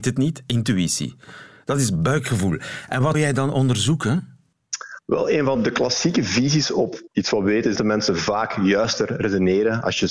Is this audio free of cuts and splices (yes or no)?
no